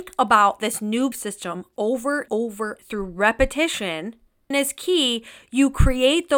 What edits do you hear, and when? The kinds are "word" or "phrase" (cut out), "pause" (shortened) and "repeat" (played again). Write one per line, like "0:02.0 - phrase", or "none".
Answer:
0:01.1 - word
0:02.3 - word
0:02.8 - word
0:04.5 - word